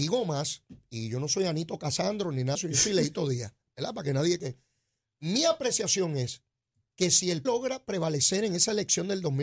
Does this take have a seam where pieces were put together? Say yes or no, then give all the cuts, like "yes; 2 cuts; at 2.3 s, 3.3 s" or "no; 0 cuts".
yes; 4 cuts; at 2.5 s, 4.4 s, 6.7 s, 7.4 s